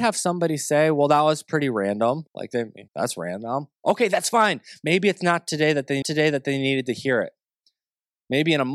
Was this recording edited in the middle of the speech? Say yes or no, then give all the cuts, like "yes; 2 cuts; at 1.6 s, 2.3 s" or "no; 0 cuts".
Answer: yes; 3 cuts; at 2.3 s, 2.9 s, 6.0 s